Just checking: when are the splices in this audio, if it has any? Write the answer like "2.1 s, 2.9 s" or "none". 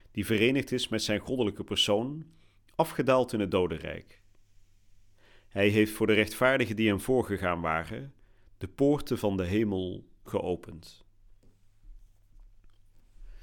none